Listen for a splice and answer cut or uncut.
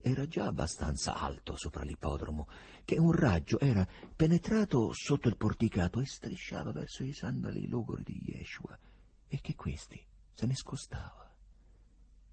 uncut